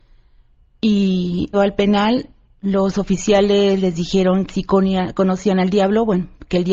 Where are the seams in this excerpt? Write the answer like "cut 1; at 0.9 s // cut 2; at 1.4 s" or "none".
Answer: cut 1; at 1.5 s // cut 2; at 2.5 s // cut 3; at 4.5 s